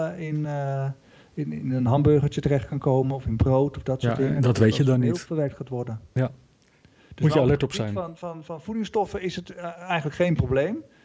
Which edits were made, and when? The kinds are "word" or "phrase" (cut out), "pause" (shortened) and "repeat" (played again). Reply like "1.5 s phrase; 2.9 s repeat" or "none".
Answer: none